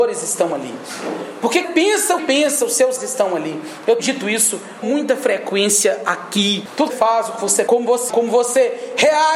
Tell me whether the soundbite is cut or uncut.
cut